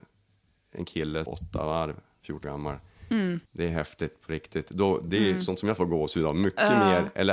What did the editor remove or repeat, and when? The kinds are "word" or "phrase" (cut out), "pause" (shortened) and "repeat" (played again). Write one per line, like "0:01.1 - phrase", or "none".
0:01.3 - phrase
0:02.4 - word
0:03.5 - pause